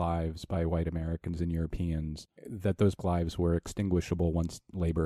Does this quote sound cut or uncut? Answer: cut